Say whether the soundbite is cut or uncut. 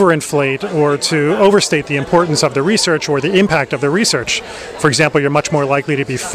uncut